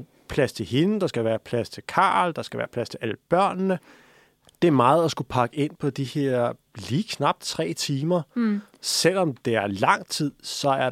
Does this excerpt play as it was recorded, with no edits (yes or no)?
yes